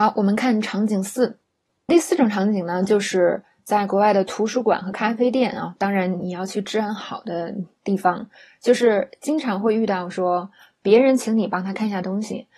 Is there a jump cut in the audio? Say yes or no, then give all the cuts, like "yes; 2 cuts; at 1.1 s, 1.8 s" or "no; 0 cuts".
yes; 1 cut; at 1.9 s